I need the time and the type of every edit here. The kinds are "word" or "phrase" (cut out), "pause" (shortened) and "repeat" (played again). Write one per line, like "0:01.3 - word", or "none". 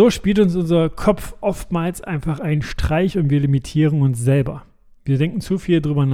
none